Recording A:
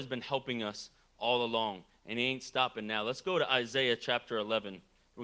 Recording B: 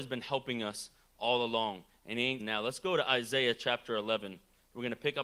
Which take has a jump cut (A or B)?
B